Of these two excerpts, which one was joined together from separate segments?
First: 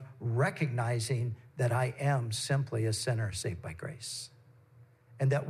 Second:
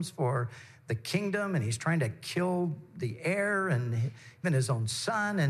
second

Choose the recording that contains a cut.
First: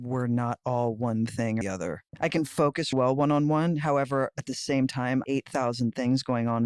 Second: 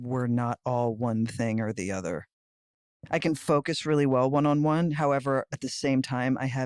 first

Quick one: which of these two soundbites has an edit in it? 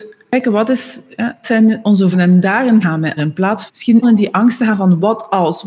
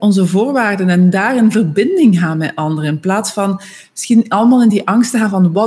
first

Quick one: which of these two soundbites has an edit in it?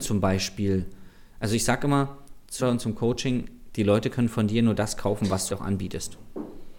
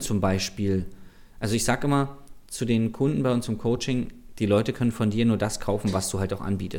first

